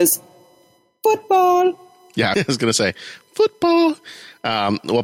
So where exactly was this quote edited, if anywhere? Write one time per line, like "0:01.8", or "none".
0:02.3